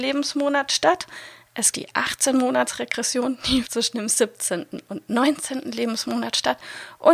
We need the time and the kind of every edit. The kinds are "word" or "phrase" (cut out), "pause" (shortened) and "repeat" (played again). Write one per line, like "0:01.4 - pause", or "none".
0:01.7 - word
0:03.6 - word

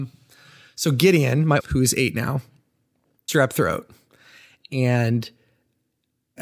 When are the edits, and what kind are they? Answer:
0:01.6 - word
0:03.3 - word

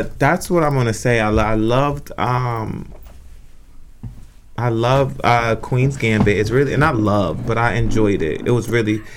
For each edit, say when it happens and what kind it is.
none

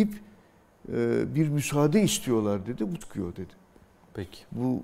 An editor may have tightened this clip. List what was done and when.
0:03.0 - phrase

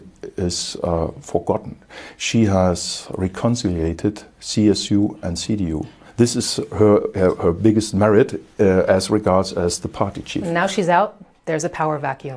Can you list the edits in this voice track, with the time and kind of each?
0:07.1 - word

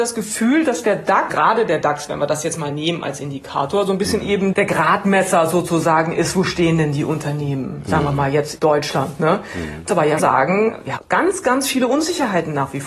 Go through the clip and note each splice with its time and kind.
0:01.3 - word
0:04.5 - word
0:08.6 - word
0:09.9 - word
0:10.2 - word
0:11.0 - word

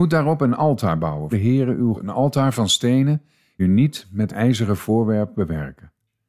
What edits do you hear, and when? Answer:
0:01.3 - word
0:01.9 - word
0:03.6 - word
0:04.3 - word
0:05.3 - word

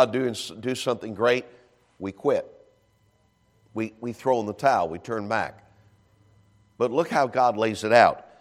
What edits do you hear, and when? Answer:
none

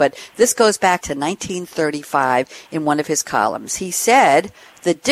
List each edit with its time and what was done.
0:01.0 - word

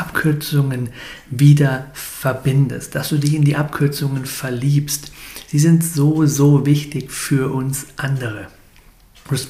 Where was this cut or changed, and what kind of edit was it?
none

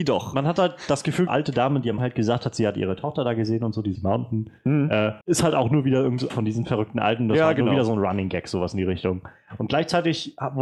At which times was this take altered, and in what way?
0:01.3 - phrase
0:02.0 - word
0:04.0 - word
0:05.2 - pause
0:06.3 - word

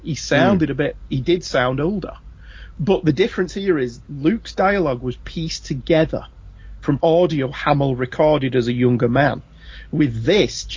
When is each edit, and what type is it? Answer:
0:07.0 - word

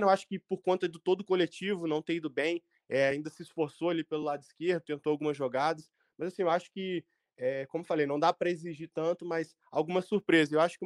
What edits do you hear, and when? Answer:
none

